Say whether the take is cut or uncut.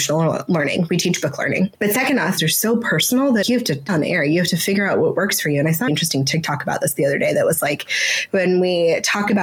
cut